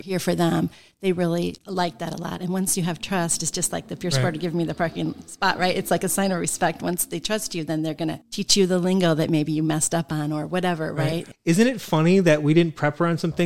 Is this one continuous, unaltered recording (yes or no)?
yes